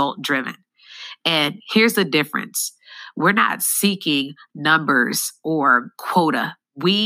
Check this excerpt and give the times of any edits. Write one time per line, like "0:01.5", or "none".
none